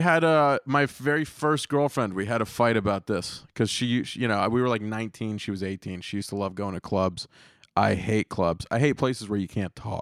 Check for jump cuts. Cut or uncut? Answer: uncut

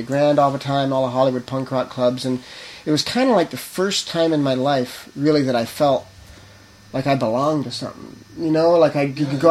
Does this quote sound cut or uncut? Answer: uncut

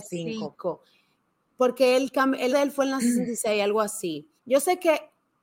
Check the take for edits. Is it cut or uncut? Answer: cut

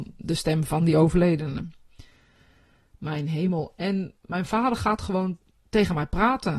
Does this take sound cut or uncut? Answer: uncut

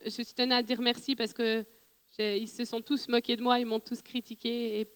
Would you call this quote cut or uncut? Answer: uncut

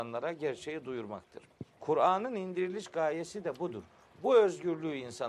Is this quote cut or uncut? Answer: cut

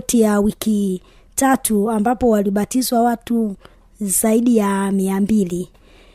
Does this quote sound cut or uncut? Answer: uncut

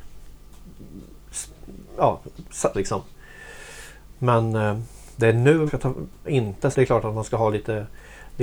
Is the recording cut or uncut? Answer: cut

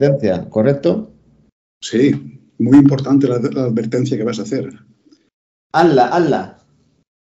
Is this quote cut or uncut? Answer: uncut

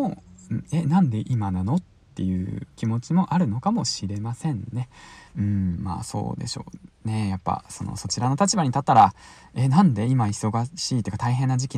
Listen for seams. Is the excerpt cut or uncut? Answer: cut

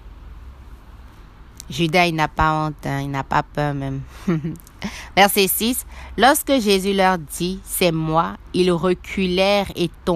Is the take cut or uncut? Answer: uncut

